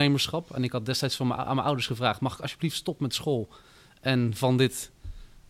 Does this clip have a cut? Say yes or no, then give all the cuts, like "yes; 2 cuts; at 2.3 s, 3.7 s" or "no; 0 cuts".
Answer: no; 0 cuts